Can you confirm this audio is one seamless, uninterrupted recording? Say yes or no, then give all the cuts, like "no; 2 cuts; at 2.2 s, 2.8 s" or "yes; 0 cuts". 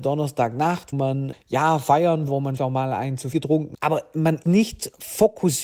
no; 7 cuts; at 0.9 s, 1.3 s, 2.3 s, 2.6 s, 3.3 s, 3.7 s, 4.4 s